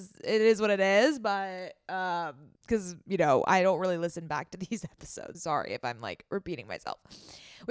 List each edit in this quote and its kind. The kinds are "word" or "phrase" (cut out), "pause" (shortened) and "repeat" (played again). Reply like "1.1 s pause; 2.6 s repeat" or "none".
2.6 s pause; 5.3 s word